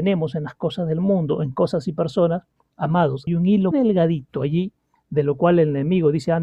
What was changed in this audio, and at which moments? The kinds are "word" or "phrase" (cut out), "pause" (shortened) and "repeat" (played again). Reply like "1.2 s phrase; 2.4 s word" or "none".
3.3 s word; 3.7 s word

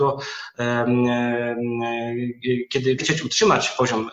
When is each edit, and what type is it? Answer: 3.0 s word

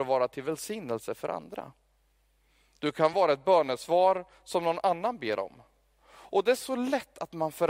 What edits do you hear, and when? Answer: none

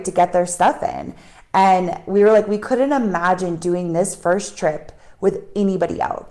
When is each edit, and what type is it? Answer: none

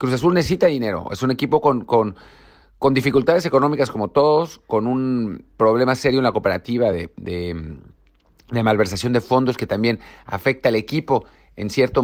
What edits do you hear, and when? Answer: none

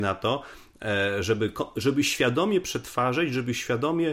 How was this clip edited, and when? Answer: none

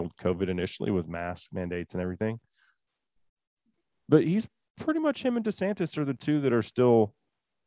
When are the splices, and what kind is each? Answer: none

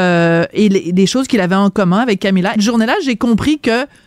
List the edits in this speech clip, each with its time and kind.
2.6 s word

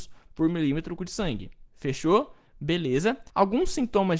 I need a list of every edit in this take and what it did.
1.0 s word; 1.7 s pause; 3.3 s pause

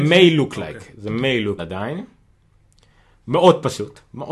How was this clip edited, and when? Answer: 1.6 s phrase

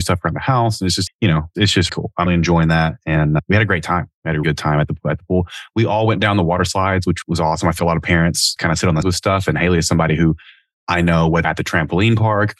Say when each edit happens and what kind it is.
1.1 s word; 1.9 s word; 2.3 s word; 4.4 s word; 7.8 s word; 8.6 s word; 9.0 s word; 11.4 s word

